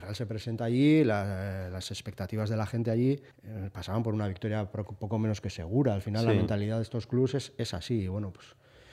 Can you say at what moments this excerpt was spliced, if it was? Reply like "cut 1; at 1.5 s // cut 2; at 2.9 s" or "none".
cut 1; at 3.3 s